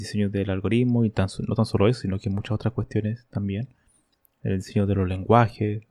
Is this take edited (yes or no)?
no